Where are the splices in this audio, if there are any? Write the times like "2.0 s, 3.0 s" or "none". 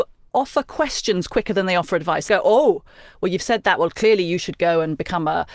2.3 s